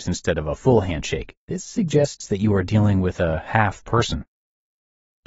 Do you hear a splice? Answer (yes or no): yes